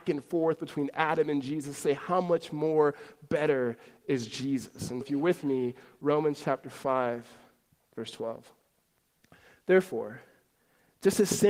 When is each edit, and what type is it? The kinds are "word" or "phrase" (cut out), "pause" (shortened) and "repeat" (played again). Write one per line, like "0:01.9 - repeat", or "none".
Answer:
0:05.0 - word